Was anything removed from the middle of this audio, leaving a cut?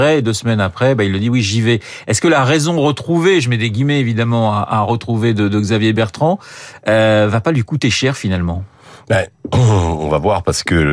no; 0 cuts

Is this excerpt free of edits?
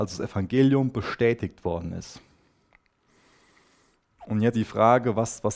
no; 1 cut; at 4.5 s

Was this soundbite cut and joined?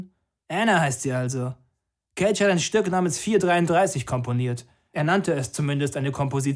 no; 0 cuts

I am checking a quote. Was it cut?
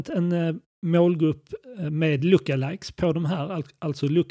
no; 0 cuts

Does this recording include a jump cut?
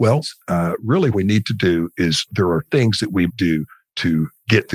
yes; 4 cuts; at 1.1 s, 2.3 s, 2.7 s, 3.3 s

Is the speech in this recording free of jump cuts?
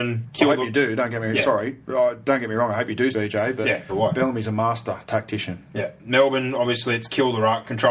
no; 2 cuts; at 3.1 s, 3.9 s

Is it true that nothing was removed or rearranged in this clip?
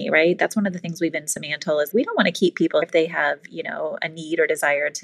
no; 3 cuts; at 1.1 s, 1.9 s, 2.8 s

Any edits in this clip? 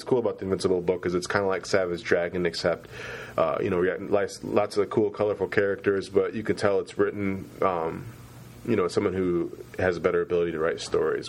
no; 0 cuts

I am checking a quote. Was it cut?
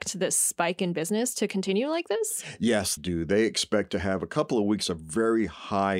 yes; 1 cut; at 3.0 s

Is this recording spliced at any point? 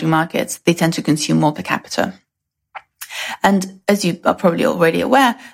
yes; 1 cut; at 1.5 s

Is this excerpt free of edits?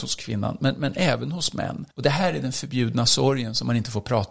no; 1 cut; at 1.9 s

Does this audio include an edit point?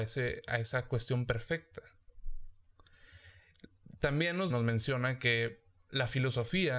yes; 1 cut; at 4.5 s

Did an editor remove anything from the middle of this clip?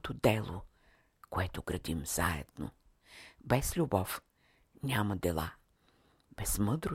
no; 0 cuts

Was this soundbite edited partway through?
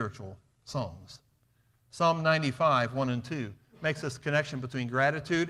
no; 0 cuts

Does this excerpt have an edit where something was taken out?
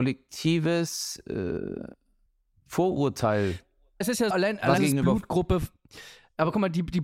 yes; 3 cuts; at 4.0 s, 4.3 s, 4.8 s

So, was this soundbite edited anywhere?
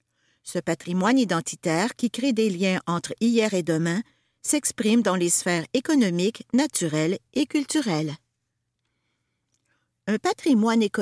no; 0 cuts

